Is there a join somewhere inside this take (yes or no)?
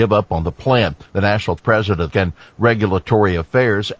yes